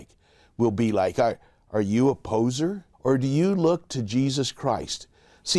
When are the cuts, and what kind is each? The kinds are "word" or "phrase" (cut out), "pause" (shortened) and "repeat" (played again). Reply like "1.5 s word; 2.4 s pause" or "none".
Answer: 2.9 s pause